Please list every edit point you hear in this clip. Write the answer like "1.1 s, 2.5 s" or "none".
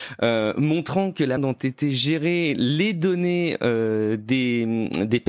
1.4 s